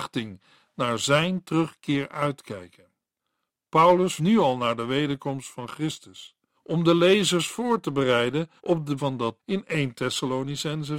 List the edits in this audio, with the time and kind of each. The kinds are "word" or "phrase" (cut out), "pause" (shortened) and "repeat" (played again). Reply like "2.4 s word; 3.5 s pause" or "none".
4.2 s word; 6.5 s pause; 8.6 s pause; 9.0 s word; 9.4 s word